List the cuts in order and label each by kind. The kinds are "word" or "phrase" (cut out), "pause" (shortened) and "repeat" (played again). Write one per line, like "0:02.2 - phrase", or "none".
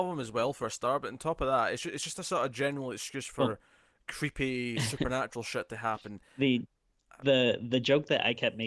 none